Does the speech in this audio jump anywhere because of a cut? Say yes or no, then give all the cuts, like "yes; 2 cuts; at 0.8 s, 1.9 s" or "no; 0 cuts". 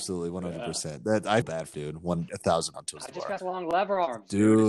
yes; 5 cuts; at 1.4 s, 1.7 s, 2.3 s, 2.7 s, 3.4 s